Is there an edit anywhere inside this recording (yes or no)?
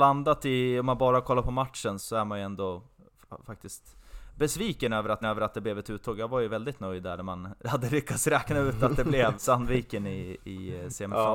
yes